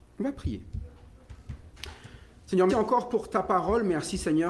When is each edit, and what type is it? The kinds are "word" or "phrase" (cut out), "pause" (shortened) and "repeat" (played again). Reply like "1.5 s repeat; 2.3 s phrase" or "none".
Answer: 2.7 s word